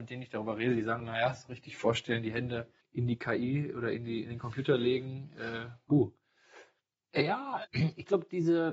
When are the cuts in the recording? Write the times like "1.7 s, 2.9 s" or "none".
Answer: 1.0 s, 2.8 s, 7.6 s